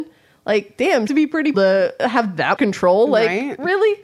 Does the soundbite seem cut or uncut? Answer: cut